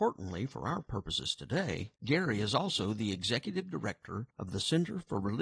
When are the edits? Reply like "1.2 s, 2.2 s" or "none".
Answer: 2.0 s, 4.3 s